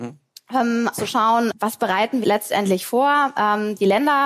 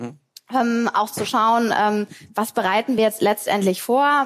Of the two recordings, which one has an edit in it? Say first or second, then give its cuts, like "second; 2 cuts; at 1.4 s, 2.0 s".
first; 3 cuts; at 0.9 s, 1.5 s, 2.2 s